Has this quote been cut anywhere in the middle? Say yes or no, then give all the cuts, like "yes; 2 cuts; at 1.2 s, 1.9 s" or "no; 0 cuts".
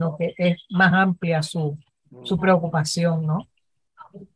no; 0 cuts